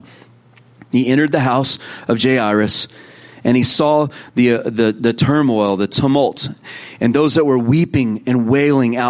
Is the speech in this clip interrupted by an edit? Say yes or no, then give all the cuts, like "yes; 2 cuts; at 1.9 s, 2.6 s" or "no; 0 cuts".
no; 0 cuts